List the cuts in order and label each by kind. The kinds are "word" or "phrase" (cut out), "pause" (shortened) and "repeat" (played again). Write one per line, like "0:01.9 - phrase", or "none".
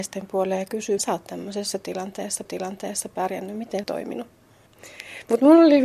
0:01.0 - word
0:02.4 - repeat
0:03.8 - phrase